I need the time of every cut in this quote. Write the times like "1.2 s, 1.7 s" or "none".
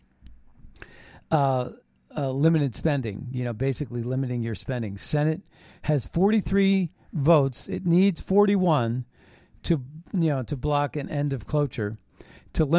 none